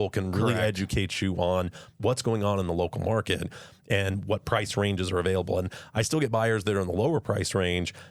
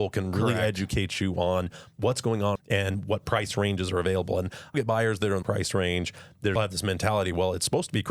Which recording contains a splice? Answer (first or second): second